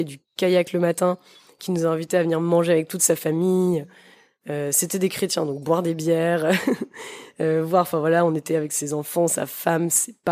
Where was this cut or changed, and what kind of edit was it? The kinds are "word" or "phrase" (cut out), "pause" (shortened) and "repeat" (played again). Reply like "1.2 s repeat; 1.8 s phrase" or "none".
none